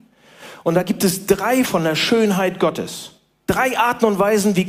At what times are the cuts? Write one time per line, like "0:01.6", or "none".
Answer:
0:01.7